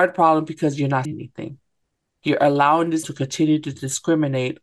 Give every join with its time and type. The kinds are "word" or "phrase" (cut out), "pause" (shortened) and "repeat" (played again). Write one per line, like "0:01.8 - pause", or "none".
0:01.0 - word
0:03.0 - word